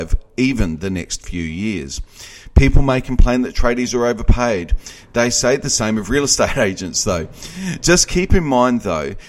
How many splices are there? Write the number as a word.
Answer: zero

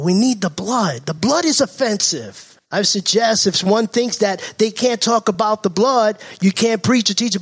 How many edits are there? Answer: one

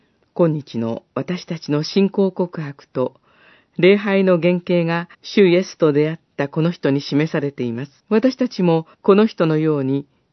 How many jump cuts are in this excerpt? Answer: three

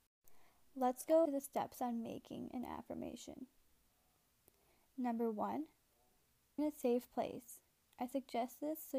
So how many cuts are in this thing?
two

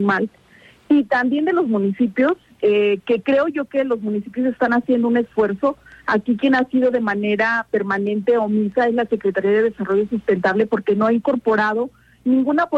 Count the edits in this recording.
zero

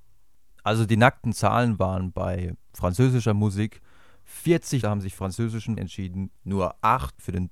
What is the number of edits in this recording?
three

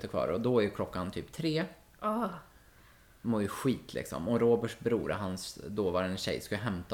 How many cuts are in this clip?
zero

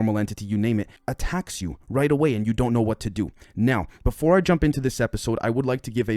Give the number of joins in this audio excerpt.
one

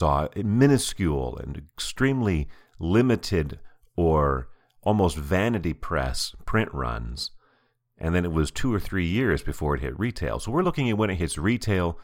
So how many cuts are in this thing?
zero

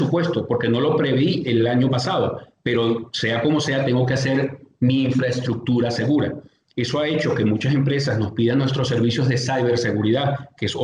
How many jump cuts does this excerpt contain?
zero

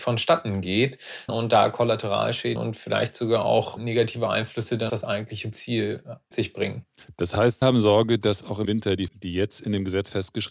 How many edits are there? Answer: nine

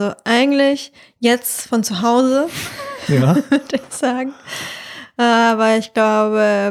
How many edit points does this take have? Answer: one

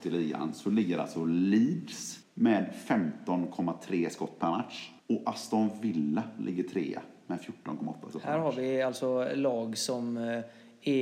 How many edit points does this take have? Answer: two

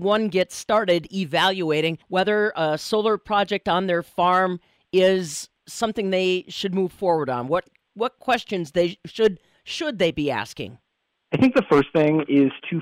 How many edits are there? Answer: two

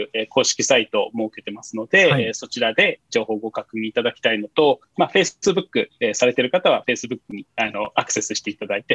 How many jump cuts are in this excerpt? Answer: one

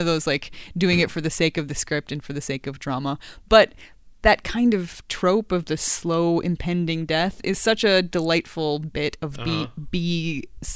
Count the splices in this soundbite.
zero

